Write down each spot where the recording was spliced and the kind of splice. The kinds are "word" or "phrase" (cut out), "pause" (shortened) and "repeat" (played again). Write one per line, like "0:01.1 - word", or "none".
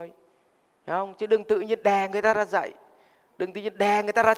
none